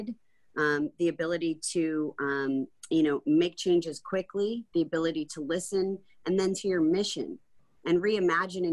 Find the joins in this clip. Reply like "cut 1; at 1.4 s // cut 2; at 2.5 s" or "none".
cut 1; at 6.6 s